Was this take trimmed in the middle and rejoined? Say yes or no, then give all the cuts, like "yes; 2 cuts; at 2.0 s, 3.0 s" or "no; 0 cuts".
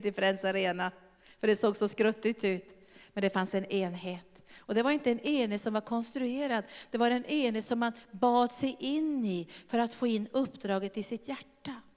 no; 0 cuts